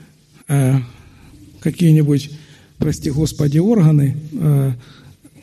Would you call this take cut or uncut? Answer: uncut